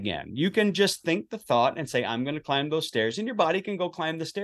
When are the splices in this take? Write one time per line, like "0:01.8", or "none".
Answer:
none